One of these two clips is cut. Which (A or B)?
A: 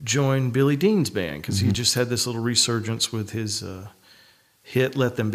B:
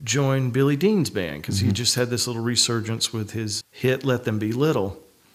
B